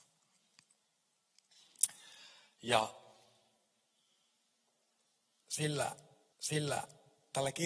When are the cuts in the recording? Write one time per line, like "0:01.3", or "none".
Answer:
0:06.3